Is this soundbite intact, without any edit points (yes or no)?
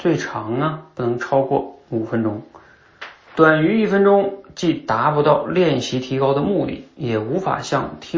yes